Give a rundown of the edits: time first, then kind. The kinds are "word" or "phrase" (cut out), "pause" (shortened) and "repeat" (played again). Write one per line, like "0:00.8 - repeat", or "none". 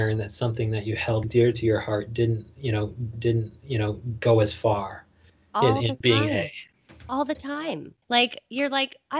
0:01.2 - word
0:03.1 - repeat
0:05.3 - pause
0:06.0 - word
0:08.0 - pause